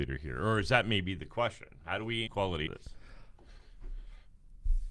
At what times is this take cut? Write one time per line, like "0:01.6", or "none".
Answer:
0:02.3
0:02.7